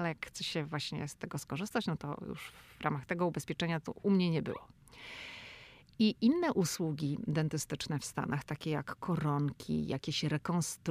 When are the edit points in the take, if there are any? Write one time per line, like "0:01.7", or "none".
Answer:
none

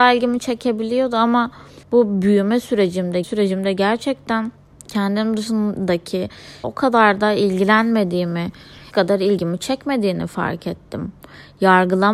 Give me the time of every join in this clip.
0:01.8
0:03.2
0:04.7
0:06.6
0:08.9

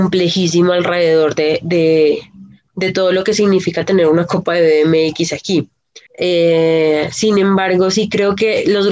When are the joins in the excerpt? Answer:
0:06.1

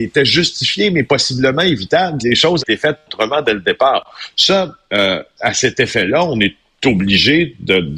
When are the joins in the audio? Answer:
0:02.2
0:02.6
0:05.4

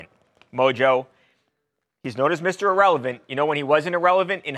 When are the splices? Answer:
none

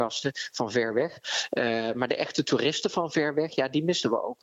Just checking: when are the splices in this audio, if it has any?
none

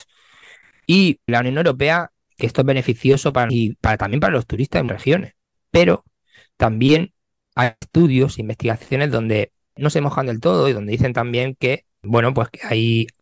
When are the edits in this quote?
0:01.3
0:02.4
0:03.5
0:04.9
0:07.8

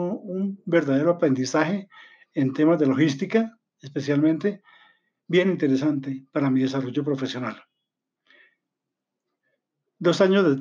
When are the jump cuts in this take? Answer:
none

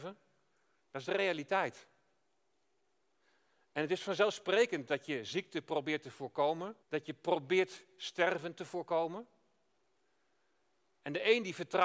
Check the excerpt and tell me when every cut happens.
0:06.8

